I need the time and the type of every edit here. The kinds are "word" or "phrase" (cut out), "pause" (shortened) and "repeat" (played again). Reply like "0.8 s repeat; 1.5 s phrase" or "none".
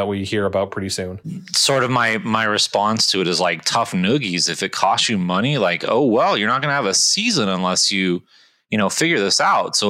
none